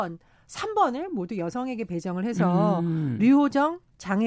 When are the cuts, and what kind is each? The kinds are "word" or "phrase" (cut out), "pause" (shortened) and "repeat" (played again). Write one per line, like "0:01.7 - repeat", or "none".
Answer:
none